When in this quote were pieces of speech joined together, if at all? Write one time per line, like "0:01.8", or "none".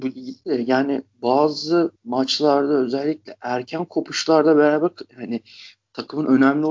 0:02.0